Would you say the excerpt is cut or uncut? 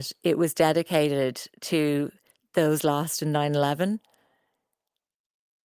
uncut